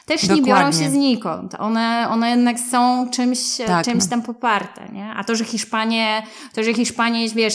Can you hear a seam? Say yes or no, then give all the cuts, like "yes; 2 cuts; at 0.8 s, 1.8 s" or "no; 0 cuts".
no; 0 cuts